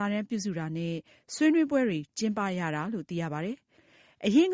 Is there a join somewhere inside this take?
no; 0 cuts

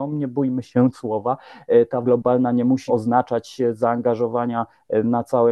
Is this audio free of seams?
no; 3 cuts; at 0.9 s, 2.0 s, 2.9 s

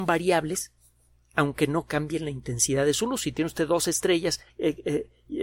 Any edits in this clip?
yes; 1 cut; at 4.5 s

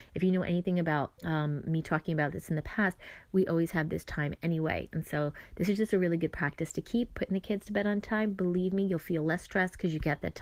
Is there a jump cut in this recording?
yes; 1 cut; at 1.2 s

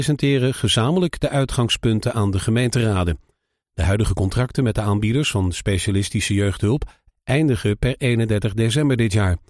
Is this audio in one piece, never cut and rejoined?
yes; 0 cuts

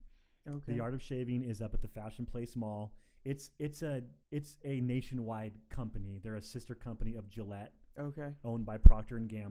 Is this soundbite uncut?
no; 1 cut; at 4.2 s

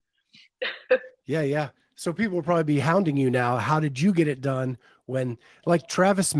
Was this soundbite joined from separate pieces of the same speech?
no; 0 cuts

